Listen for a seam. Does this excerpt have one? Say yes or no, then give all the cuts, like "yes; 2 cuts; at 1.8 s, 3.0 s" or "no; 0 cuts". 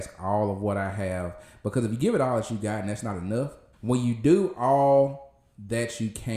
yes; 1 cut; at 3.7 s